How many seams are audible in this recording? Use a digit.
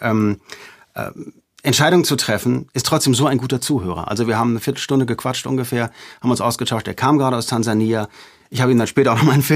0